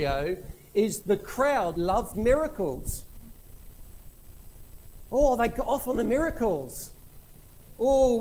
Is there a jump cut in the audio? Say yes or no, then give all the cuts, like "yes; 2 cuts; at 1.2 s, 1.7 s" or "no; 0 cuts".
yes; 3 cuts; at 1.0 s, 1.8 s, 2.1 s